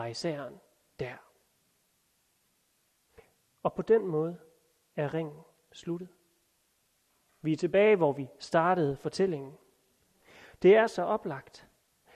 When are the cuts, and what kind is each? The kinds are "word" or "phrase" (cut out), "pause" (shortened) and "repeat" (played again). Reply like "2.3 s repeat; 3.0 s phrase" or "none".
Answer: none